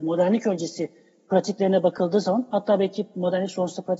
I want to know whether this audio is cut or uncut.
uncut